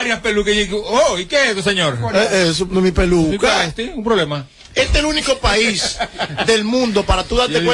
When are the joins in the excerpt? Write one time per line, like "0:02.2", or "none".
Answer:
none